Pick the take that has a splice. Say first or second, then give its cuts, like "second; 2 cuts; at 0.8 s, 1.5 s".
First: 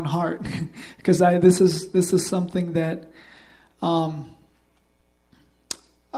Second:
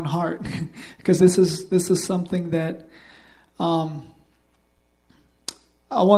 second; 1 cut; at 1.2 s